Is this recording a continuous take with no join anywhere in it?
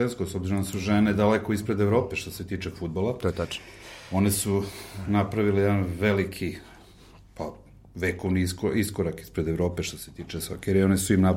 yes; 0 cuts

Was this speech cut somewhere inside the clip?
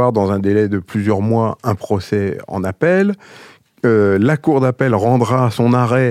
no; 0 cuts

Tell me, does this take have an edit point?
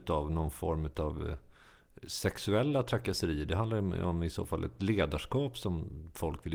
no; 0 cuts

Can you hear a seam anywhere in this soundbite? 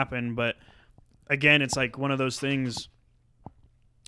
no; 0 cuts

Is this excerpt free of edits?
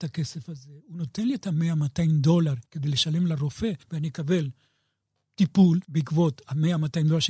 no; 3 cuts; at 2.7 s, 3.8 s, 5.8 s

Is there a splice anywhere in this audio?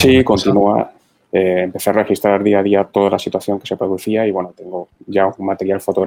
no; 0 cuts

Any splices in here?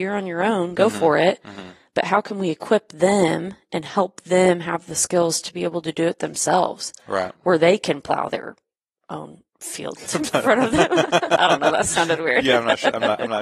no; 0 cuts

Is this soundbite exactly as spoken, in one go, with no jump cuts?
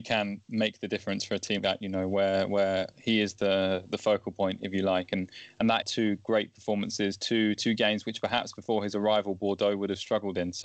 no; 2 cuts; at 1.6 s, 5.8 s

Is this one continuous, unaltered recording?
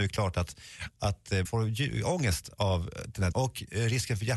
no; 2 cuts; at 1.4 s, 3.3 s

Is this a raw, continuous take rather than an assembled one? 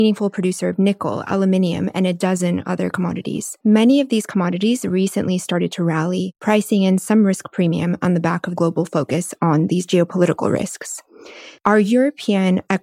no; 2 cuts; at 3.6 s, 8.6 s

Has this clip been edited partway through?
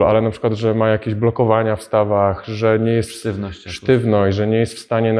no; 0 cuts

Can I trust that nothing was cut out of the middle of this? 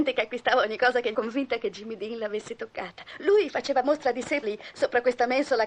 no; 3 cuts; at 1.1 s, 3.8 s, 4.4 s

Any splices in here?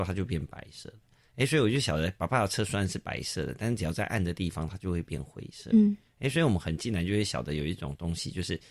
no; 0 cuts

